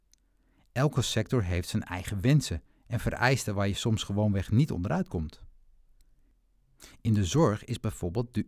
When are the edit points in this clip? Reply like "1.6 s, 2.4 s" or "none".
none